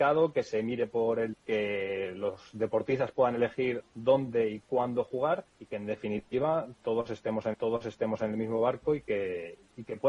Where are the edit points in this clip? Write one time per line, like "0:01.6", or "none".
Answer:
0:01.3
0:05.5
0:07.5